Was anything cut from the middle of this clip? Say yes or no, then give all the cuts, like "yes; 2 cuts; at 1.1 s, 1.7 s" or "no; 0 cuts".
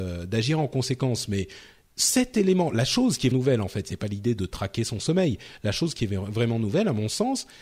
yes; 1 cut; at 3.3 s